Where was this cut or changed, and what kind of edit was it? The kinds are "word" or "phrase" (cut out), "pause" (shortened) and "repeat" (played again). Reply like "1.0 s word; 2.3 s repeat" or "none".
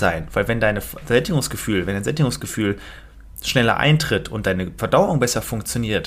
none